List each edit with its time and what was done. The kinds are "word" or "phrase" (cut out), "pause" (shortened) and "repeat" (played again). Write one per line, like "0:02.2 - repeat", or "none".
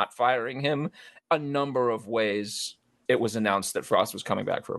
0:03.1 - word